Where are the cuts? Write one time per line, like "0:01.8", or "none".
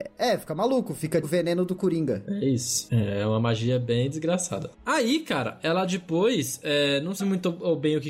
0:01.2
0:07.2